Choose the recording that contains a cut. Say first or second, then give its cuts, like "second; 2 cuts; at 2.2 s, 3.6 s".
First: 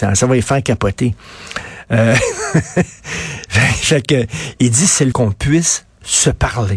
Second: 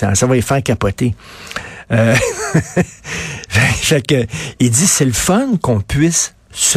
first; 1 cut; at 5.1 s